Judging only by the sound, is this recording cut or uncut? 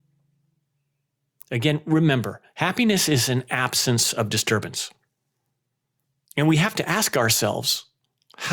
uncut